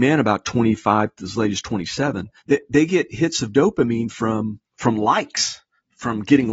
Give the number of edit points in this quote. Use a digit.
2